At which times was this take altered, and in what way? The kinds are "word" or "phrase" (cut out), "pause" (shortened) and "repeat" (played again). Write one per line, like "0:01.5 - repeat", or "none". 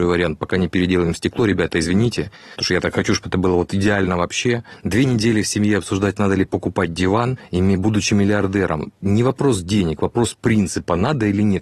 none